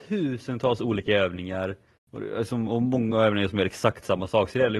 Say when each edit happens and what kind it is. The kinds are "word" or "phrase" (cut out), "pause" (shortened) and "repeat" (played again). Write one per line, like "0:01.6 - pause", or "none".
none